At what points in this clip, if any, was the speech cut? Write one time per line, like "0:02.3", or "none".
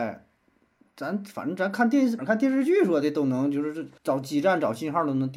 0:02.2
0:04.0